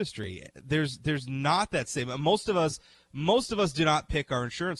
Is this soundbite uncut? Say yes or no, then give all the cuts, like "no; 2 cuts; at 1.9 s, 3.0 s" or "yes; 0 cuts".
yes; 0 cuts